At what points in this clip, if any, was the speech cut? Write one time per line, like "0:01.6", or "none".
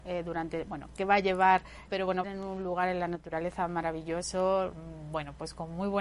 0:01.9
0:02.2